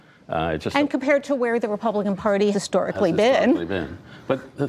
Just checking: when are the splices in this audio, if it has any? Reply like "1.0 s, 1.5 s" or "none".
2.5 s